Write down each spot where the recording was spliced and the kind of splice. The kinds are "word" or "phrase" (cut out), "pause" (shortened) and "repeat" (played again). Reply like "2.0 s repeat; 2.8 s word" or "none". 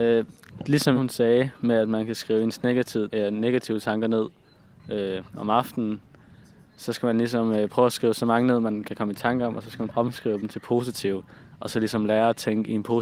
1.0 s word; 3.1 s word; 9.9 s word

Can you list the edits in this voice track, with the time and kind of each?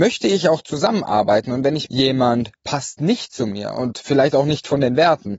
1.9 s word

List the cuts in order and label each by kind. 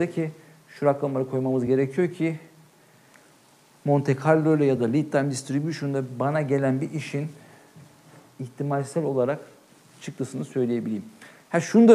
none

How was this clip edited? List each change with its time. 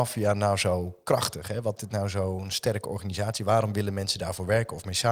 1.8 s word

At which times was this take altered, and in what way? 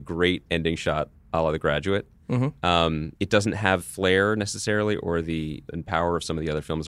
3.2 s pause; 3.8 s word; 5.7 s word

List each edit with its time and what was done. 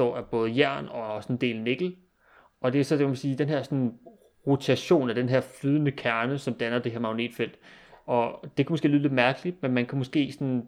none

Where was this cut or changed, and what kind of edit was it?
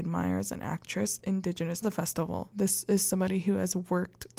1.2 s phrase; 1.8 s phrase

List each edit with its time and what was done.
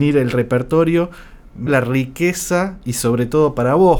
1.7 s word

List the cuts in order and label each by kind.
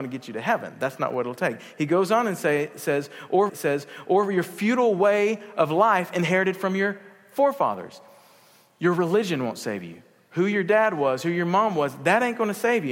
3.5 s repeat

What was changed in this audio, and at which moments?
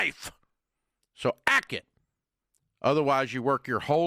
1.7 s word

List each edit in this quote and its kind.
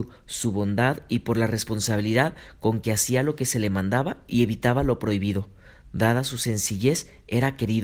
none

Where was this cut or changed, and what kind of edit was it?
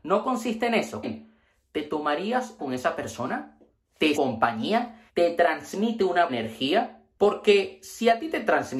1.0 s word; 2.6 s phrase; 4.1 s phrase; 5.1 s pause; 6.3 s word

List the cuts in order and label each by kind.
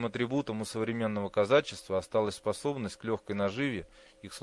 none

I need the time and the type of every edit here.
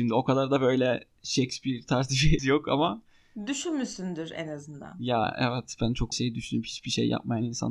2.4 s word; 6.1 s word

